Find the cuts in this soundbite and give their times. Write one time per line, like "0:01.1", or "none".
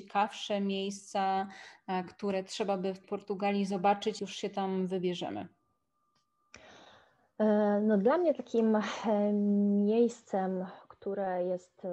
0:03.0
0:04.2